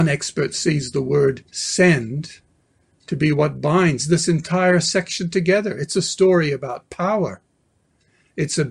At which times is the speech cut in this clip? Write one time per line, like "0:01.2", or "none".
0:01.5